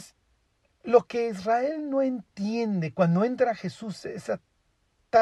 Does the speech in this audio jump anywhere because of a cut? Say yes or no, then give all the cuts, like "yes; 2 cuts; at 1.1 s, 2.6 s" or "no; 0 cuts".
no; 0 cuts